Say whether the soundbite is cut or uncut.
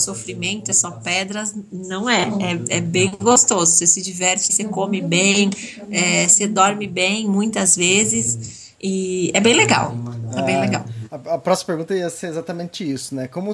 cut